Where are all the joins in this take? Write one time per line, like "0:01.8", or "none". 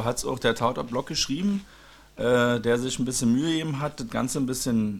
none